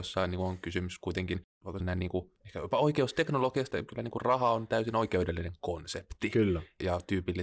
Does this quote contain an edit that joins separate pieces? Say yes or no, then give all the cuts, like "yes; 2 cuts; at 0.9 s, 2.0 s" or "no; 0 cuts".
yes; 3 cuts; at 1.8 s, 2.4 s, 3.7 s